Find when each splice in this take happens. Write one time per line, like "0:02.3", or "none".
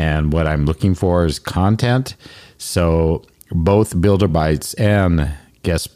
none